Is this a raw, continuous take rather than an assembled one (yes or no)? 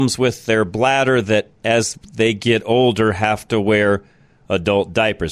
yes